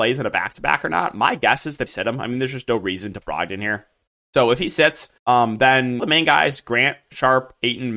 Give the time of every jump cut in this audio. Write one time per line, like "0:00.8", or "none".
0:01.9
0:03.2
0:04.1
0:05.2
0:06.0